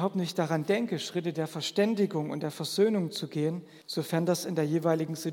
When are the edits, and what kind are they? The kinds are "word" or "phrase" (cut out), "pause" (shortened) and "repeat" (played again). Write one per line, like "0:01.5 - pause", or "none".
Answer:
0:03.8 - pause

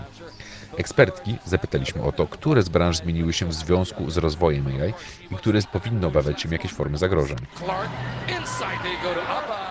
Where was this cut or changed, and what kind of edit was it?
0:05.6 - word

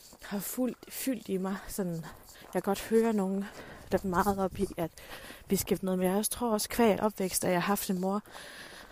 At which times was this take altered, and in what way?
0:02.3 - pause
0:04.0 - word
0:05.8 - phrase
0:07.0 - phrase

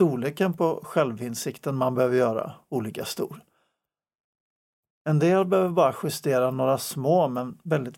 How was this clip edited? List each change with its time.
none

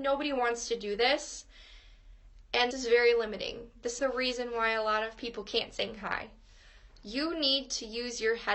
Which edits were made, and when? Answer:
0:02.7 - word
0:04.0 - word

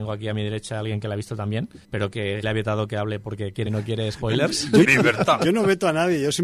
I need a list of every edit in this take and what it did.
0:01.8 - pause
0:02.4 - word
0:03.7 - word
0:04.8 - word

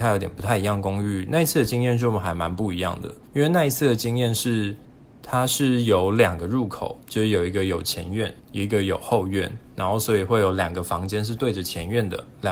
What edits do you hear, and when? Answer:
0:03.3 - pause
0:04.8 - pause
0:07.0 - pause
0:08.4 - pause

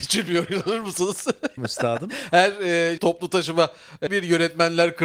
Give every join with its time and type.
0:01.6 - word
0:03.0 - word
0:04.1 - word

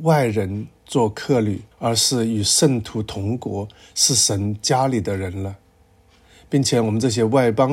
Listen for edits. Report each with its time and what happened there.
0:01.7 - pause

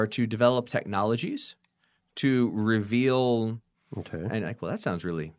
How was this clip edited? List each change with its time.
0:03.7 - word

